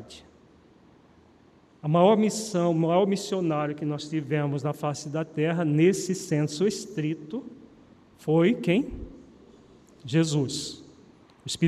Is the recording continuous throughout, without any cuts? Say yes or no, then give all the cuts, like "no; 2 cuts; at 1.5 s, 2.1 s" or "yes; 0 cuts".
yes; 0 cuts